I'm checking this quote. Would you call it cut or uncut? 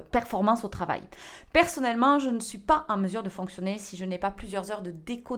uncut